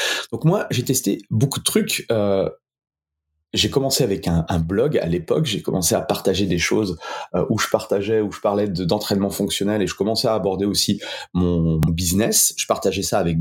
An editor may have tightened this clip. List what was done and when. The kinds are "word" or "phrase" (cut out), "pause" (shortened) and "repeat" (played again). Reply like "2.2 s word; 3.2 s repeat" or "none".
11.9 s word